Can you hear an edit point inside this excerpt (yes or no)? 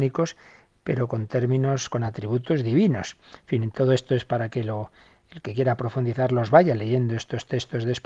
no